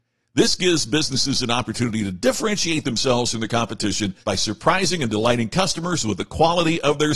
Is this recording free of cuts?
no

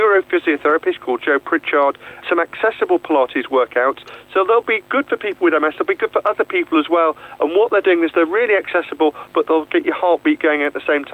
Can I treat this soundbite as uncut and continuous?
no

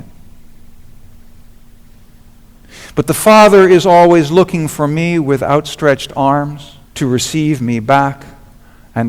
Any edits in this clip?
yes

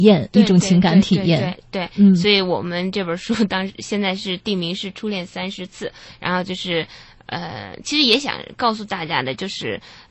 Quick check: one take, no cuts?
yes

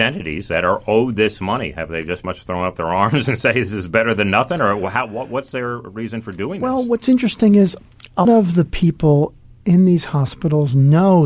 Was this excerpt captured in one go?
no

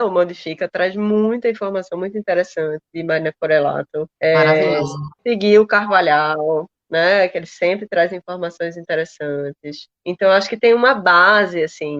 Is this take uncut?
no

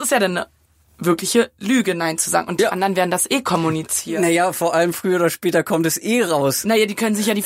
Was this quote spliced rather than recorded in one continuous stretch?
no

